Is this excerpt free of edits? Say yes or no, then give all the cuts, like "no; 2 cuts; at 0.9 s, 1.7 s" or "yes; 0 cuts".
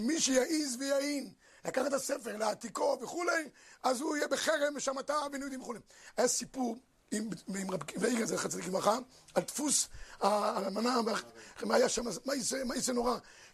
yes; 0 cuts